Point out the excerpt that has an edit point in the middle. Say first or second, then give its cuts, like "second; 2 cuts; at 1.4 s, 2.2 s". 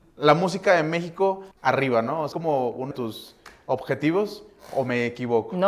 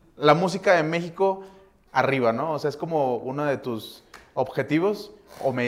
first; 3 cuts; at 1.5 s, 2.3 s, 2.9 s